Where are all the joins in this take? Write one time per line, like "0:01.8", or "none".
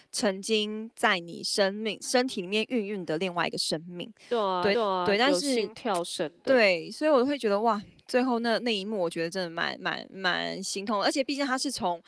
0:04.7